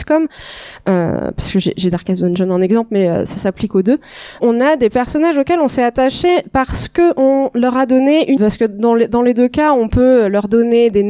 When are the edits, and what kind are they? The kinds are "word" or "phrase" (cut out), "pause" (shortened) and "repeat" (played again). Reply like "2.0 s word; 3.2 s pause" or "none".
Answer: 4.4 s word; 8.4 s word